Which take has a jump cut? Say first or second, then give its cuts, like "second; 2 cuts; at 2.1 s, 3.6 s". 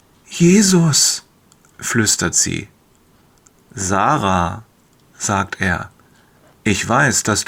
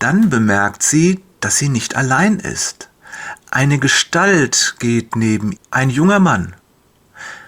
second; 1 cut; at 5.6 s